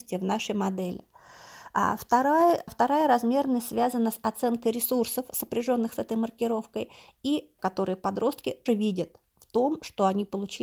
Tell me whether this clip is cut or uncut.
cut